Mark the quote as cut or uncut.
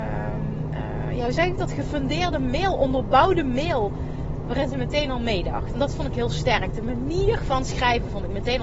uncut